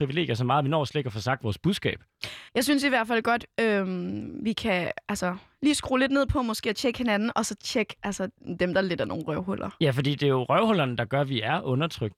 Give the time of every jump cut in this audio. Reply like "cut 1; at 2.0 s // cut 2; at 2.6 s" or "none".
cut 1; at 2.5 s